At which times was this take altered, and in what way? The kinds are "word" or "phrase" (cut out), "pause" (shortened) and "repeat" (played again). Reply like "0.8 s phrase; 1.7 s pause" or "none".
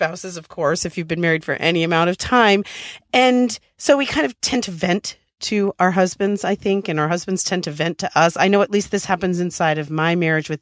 none